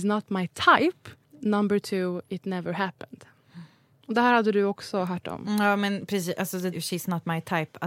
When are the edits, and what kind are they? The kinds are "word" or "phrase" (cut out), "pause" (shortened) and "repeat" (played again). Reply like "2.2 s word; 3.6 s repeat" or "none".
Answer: 1.2 s pause; 6.7 s word